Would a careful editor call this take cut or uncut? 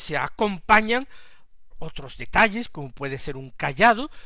cut